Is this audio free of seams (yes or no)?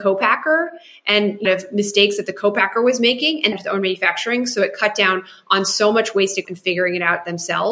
no